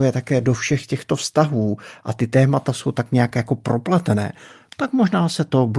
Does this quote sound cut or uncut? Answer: uncut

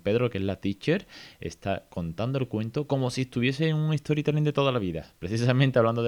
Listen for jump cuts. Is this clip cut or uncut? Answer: uncut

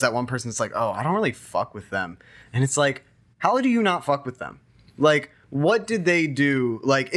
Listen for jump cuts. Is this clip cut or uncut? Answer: uncut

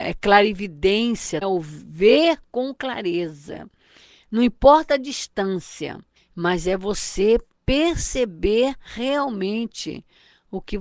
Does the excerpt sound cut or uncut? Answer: cut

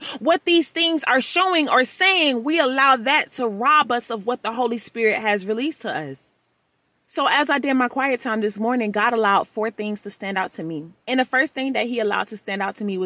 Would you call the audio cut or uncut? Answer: uncut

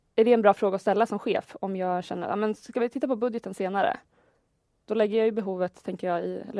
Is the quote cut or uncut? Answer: uncut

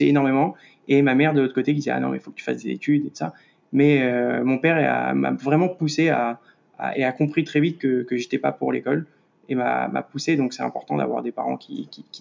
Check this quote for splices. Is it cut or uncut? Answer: uncut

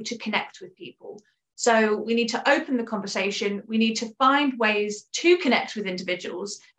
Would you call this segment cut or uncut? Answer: uncut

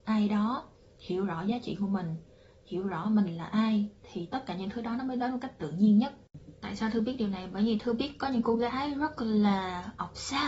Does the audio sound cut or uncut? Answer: uncut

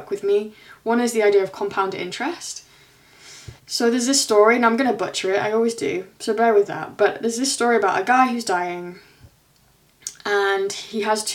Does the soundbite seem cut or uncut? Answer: cut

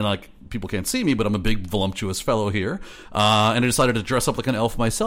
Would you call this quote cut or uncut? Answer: uncut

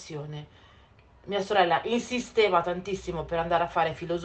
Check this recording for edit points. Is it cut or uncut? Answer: uncut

